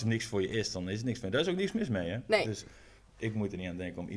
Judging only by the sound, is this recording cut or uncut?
uncut